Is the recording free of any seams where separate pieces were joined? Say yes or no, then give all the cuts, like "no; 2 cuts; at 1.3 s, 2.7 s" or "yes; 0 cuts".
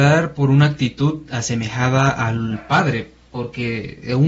yes; 0 cuts